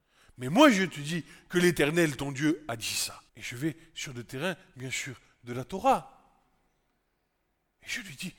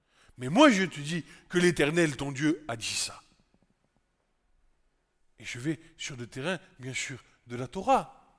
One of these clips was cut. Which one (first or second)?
first